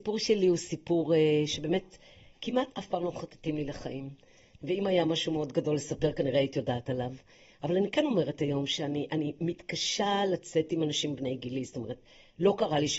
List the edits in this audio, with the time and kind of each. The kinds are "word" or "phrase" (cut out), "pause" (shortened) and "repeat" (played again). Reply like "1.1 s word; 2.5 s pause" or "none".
none